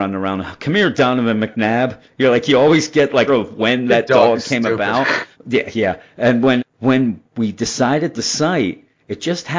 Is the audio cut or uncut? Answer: cut